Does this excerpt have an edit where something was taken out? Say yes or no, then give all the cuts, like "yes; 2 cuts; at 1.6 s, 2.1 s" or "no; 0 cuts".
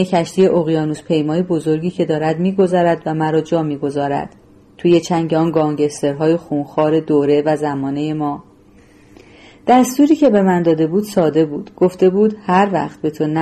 no; 0 cuts